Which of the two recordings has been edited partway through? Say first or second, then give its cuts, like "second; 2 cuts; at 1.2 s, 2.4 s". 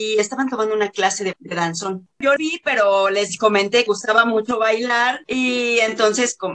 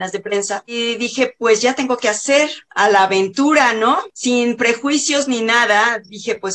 first; 3 cuts; at 1.3 s, 2.4 s, 3.9 s